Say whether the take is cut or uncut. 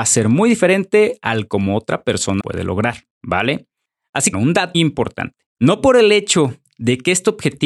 cut